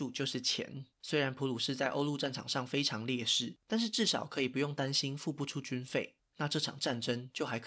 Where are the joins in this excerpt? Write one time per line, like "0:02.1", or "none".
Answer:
0:00.9
0:03.6
0:06.3